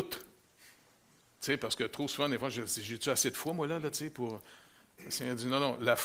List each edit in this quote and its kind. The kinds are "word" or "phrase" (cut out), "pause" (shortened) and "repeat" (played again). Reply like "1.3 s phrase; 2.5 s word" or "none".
none